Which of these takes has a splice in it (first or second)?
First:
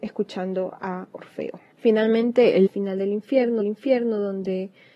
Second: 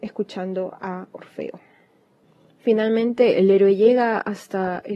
first